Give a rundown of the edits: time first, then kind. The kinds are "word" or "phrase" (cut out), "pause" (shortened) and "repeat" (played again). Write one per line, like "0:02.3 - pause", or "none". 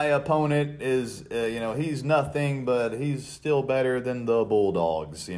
none